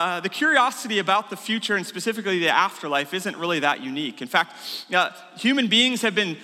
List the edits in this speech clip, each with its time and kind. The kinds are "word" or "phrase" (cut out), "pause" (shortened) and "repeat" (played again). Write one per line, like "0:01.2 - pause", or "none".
none